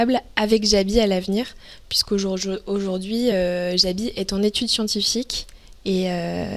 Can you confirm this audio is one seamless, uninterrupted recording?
yes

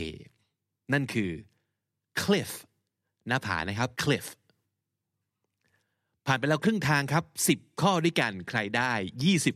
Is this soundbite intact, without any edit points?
no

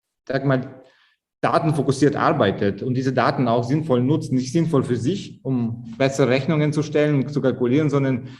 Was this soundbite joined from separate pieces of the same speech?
no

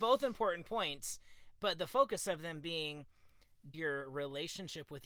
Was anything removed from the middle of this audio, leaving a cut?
yes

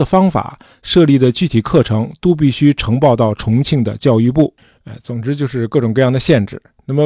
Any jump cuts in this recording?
no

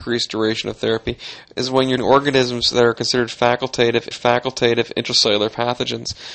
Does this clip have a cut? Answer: yes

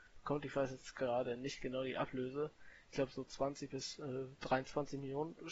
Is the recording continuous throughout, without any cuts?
yes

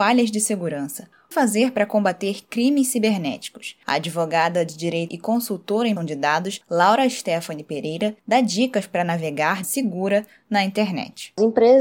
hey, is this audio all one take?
no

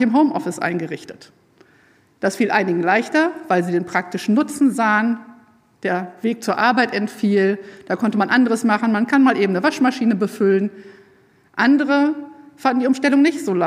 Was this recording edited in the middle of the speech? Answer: no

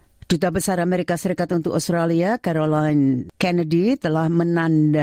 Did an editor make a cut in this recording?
no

